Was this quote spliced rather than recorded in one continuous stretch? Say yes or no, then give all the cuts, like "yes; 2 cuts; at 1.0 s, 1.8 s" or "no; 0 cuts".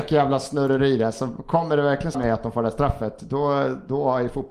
yes; 1 cut; at 2.1 s